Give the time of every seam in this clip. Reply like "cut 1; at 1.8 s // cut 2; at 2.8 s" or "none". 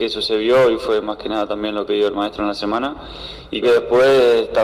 cut 1; at 1.9 s // cut 2; at 3.6 s